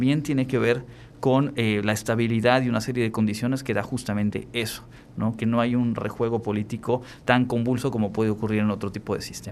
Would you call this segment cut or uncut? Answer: uncut